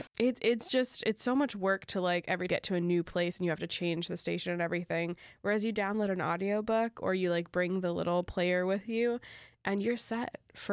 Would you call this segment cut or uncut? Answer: cut